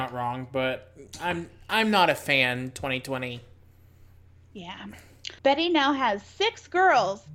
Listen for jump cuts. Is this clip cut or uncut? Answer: cut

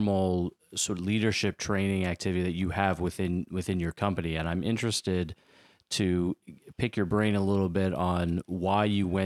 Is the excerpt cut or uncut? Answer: uncut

